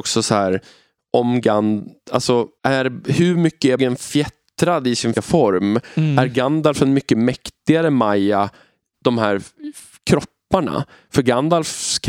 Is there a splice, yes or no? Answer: yes